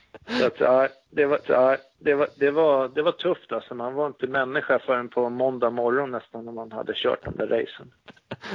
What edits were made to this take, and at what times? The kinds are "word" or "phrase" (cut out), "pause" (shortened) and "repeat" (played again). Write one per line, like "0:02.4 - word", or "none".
0:01.4 - repeat